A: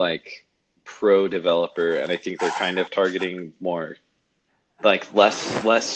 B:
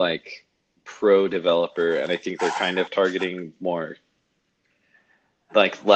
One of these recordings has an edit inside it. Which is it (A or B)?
A